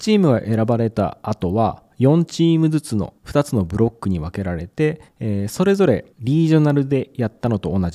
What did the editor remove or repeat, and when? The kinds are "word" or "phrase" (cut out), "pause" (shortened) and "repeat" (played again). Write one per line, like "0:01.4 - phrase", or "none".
0:03.2 - pause
0:05.1 - pause
0:06.1 - pause